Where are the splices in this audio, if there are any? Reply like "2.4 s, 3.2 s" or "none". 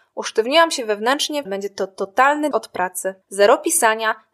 1.5 s, 2.5 s, 3.2 s